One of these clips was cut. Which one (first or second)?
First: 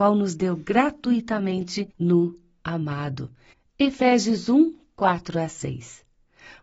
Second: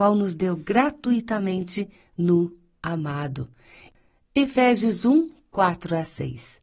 first